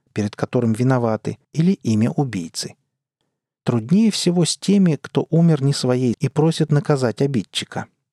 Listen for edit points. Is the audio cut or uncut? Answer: cut